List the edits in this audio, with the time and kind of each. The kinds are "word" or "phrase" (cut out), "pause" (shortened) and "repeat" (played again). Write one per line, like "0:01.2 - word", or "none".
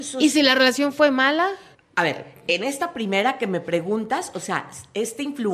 0:01.7 - pause